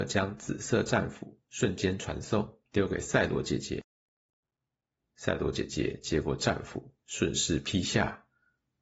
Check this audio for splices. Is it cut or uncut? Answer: cut